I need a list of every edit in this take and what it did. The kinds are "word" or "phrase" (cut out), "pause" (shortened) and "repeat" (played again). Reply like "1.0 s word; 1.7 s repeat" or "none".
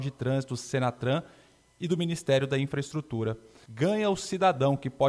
none